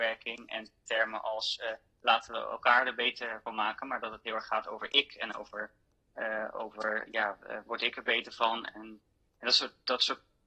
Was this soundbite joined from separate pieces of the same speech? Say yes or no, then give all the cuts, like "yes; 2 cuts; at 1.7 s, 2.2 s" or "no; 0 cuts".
no; 0 cuts